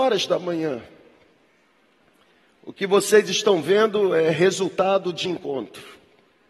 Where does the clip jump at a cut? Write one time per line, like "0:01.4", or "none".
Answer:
0:05.3